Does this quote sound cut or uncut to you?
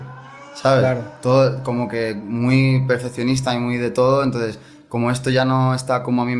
uncut